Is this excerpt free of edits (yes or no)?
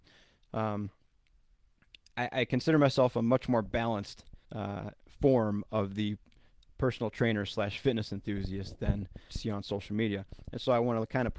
no